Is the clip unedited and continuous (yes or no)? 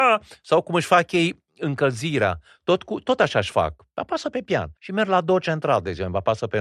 no